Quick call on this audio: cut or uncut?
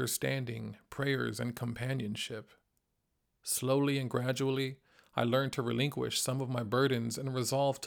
uncut